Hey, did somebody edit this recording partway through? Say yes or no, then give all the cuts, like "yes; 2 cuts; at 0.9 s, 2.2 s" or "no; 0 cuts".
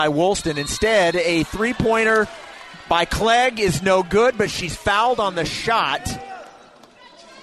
no; 0 cuts